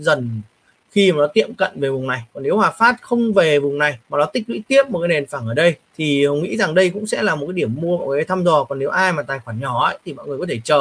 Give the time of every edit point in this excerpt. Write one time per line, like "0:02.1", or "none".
0:04.0
0:05.9